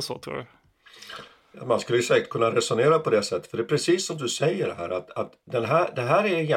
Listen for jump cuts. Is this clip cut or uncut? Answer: uncut